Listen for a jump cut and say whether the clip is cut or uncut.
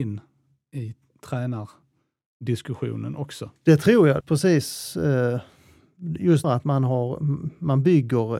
cut